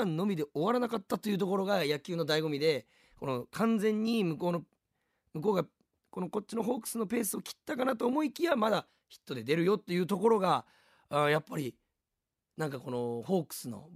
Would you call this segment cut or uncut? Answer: uncut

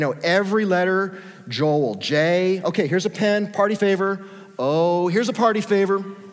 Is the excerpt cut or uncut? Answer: uncut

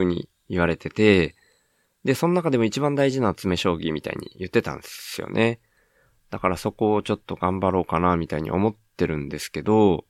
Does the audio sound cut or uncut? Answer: uncut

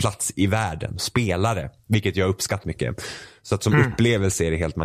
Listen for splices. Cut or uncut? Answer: cut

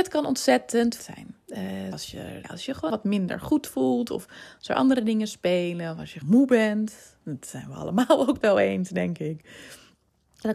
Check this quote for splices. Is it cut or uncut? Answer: cut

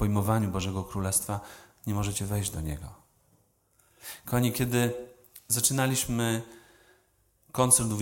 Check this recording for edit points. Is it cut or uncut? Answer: uncut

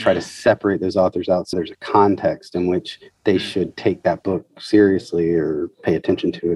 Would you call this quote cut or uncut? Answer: cut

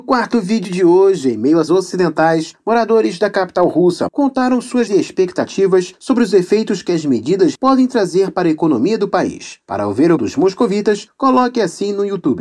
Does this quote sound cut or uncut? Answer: cut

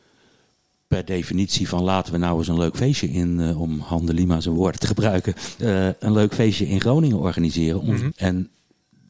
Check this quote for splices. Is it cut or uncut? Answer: cut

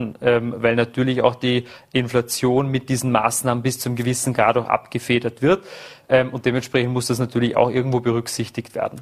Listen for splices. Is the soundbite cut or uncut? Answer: uncut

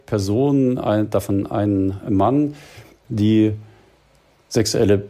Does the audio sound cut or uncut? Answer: uncut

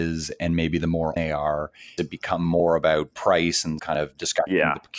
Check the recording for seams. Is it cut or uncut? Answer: cut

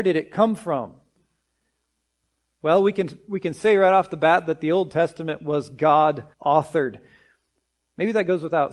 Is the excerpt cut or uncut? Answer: cut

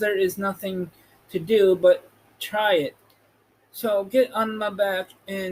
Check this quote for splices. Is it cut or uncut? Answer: uncut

